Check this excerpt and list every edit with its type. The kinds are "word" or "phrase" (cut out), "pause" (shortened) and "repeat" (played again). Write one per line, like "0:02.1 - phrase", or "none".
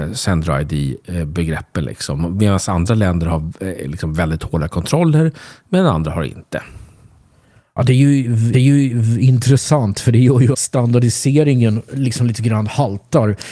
0:08.5 - repeat
0:10.5 - word